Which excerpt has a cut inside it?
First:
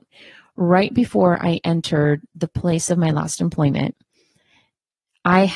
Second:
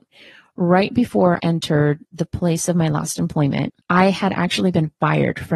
second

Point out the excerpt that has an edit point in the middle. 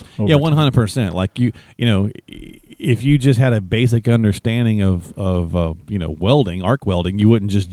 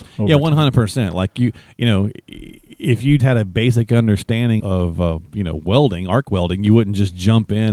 second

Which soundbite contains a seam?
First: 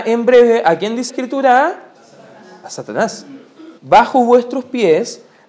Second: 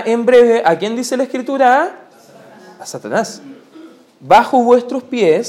first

